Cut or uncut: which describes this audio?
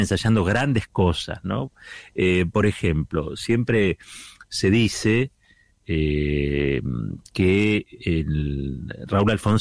uncut